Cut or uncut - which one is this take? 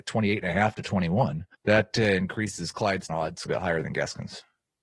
cut